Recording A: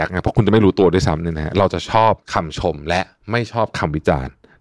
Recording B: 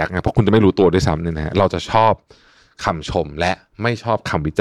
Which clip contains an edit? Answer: A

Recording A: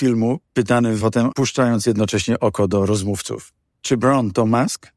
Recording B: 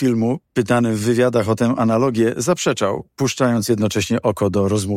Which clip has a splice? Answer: A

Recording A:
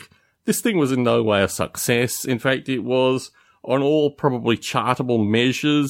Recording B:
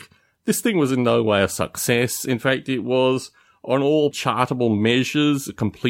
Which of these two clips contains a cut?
B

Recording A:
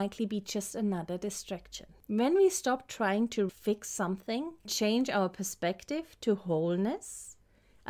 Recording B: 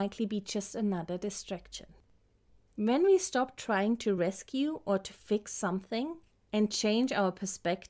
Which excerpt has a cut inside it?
A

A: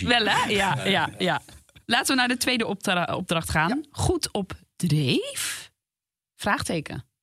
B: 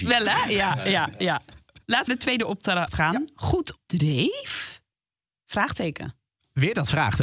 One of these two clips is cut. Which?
B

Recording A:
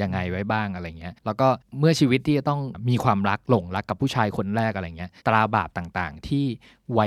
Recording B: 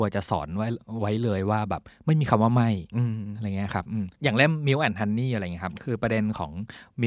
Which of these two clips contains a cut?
A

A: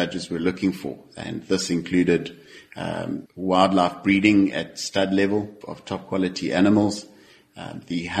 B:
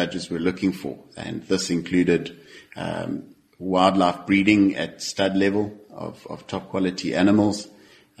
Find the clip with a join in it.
A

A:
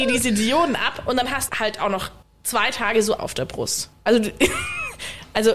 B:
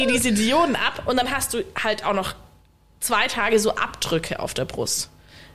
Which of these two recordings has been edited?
A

